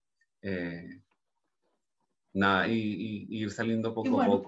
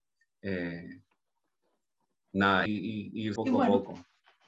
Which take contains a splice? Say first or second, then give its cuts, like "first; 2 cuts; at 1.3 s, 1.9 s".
second; 2 cuts; at 2.7 s, 3.4 s